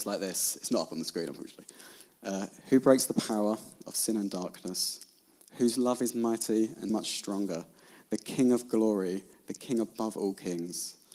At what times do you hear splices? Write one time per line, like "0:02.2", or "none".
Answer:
0:06.9